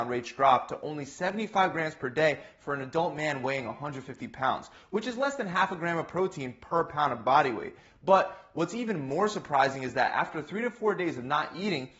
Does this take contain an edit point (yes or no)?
no